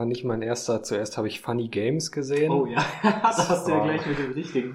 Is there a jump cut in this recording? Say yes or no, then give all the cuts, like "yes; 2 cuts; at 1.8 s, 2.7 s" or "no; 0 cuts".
no; 0 cuts